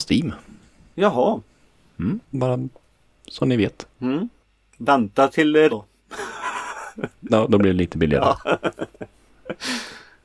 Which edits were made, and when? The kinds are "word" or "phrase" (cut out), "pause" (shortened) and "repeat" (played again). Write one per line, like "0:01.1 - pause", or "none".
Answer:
0:02.2 - pause
0:03.9 - pause
0:05.7 - word
0:07.3 - word